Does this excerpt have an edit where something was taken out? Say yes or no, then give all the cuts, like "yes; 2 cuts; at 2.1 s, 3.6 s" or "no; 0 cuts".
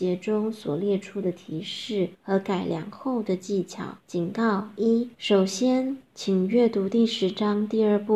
yes; 4 cuts; at 2.1 s, 4.0 s, 5.1 s, 6.1 s